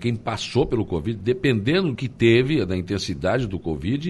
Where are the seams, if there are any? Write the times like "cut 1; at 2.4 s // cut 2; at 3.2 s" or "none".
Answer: cut 1; at 2.0 s